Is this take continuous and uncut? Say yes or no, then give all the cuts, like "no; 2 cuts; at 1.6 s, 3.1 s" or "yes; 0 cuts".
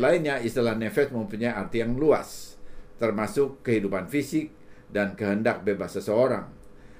yes; 0 cuts